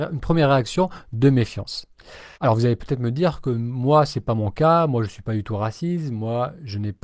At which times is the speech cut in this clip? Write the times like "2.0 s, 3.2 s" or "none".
2.3 s